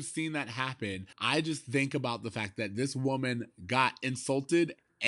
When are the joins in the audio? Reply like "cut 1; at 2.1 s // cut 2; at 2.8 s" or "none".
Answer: cut 1; at 1.1 s